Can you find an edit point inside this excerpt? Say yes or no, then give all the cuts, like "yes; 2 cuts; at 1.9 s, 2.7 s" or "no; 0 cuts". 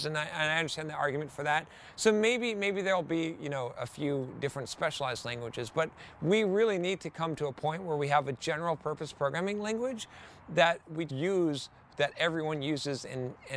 yes; 1 cut; at 11.1 s